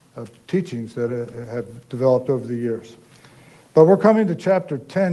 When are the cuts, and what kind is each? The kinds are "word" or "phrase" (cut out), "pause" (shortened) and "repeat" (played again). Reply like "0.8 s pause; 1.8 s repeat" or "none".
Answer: none